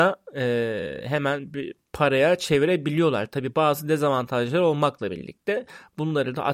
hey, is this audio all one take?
yes; 0 cuts

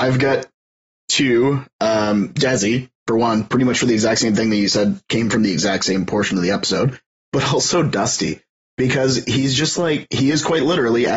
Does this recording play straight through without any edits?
yes; 0 cuts

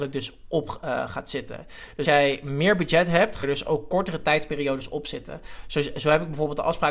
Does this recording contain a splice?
yes; 2 cuts; at 2.0 s, 3.4 s

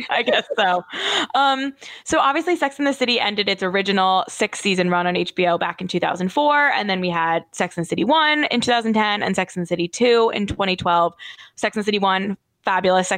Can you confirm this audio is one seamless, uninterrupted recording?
yes; 0 cuts

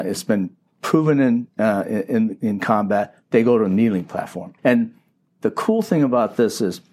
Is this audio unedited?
no; 1 cut; at 4.6 s

